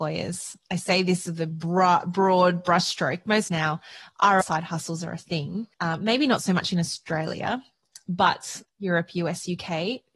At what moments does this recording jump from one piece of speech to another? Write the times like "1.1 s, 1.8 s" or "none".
3.5 s, 4.4 s, 5.7 s, 8.7 s